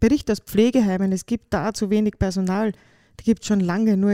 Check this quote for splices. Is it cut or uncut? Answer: uncut